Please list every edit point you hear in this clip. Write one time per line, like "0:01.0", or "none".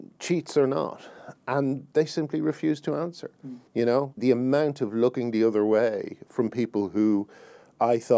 0:03.7
0:04.2